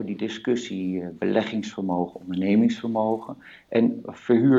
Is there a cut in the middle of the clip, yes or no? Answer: no